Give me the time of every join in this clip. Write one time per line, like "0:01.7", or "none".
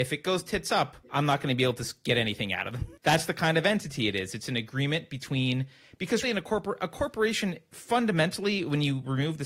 0:01.0
0:03.0
0:06.2